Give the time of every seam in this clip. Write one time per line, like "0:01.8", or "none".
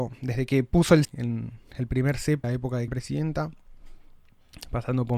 0:01.0
0:02.4
0:02.9